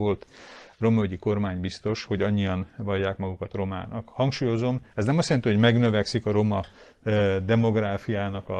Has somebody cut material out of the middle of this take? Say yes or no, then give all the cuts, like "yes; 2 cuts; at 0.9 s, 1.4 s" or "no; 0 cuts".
no; 0 cuts